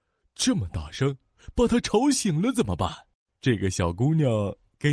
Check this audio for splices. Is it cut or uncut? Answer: cut